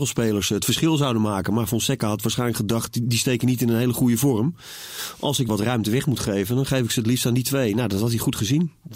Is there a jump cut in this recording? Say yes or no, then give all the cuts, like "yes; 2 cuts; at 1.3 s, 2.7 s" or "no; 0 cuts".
yes; 1 cut; at 5.5 s